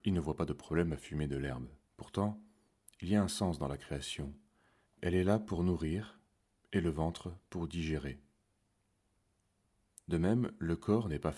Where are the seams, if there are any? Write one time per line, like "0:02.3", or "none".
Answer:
0:01.8